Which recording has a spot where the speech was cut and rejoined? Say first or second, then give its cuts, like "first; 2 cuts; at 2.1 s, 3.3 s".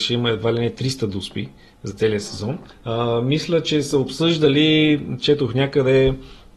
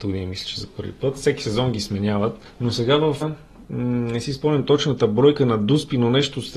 second; 1 cut; at 3.2 s